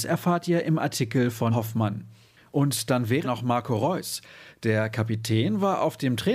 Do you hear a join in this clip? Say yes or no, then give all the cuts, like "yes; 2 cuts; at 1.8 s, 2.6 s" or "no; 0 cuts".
yes; 2 cuts; at 1.5 s, 3.2 s